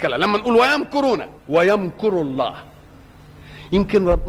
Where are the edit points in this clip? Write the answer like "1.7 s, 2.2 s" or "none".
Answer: 1.4 s